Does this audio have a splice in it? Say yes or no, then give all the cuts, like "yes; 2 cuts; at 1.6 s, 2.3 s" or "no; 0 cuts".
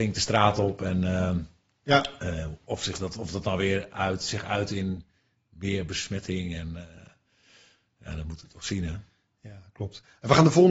no; 0 cuts